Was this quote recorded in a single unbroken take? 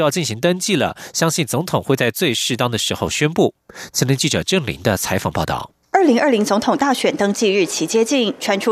yes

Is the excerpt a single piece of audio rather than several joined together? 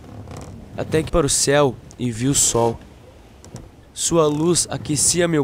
no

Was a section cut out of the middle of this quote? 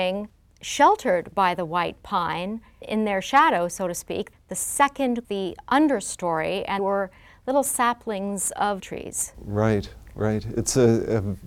yes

